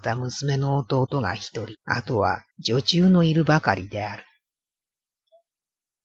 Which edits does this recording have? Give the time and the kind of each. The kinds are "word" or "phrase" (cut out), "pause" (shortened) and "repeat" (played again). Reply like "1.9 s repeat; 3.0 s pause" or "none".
1.8 s pause; 2.5 s pause